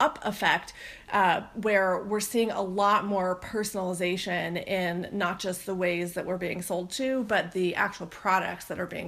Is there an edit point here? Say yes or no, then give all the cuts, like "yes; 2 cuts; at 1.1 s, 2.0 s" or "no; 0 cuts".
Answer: no; 0 cuts